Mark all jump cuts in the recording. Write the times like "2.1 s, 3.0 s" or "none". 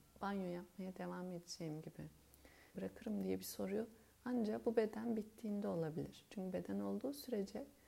2.7 s